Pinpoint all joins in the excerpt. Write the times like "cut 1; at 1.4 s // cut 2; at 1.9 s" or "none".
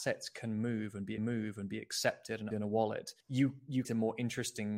cut 1; at 1.2 s // cut 2; at 2.5 s // cut 3; at 3.2 s // cut 4; at 3.8 s